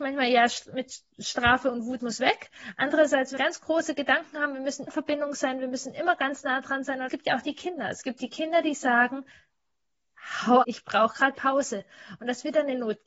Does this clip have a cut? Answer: yes; 6 cuts; at 2.0 s, 3.4 s, 4.9 s, 7.1 s, 10.6 s, 11.3 s

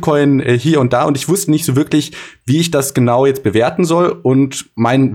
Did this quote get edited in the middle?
no; 0 cuts

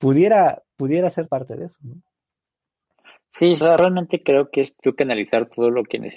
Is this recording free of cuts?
no; 3 cuts; at 1.3 s, 3.6 s, 4.8 s

